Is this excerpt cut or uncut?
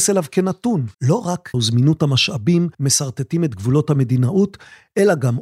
cut